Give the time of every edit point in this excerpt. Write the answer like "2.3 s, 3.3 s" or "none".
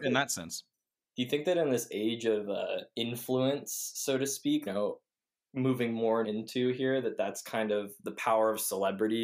4.7 s, 6.2 s